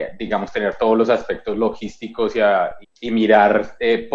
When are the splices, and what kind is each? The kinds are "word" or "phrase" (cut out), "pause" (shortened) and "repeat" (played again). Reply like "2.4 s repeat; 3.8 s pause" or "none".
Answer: 2.8 s word

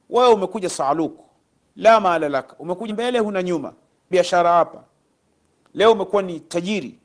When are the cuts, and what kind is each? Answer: 2.9 s word; 4.1 s word

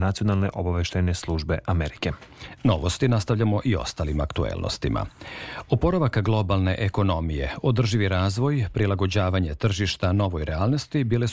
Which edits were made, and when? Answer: none

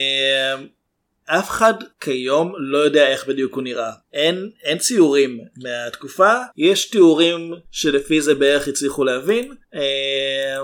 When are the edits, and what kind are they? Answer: 1.9 s pause; 4.0 s pause; 6.5 s pause; 7.6 s pause; 9.6 s pause

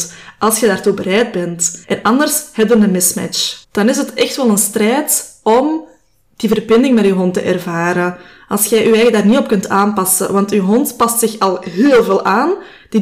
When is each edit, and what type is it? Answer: 1.8 s pause; 3.6 s pause

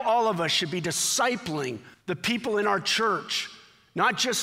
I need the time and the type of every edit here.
1.9 s pause

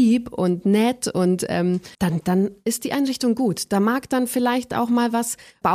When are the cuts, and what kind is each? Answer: 1.9 s pause

